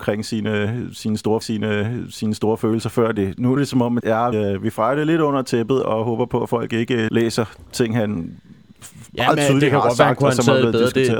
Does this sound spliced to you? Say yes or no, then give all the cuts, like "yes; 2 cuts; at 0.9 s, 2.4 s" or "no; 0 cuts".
yes; 5 cuts; at 1.4 s, 3.6 s, 4.0 s, 4.3 s, 7.1 s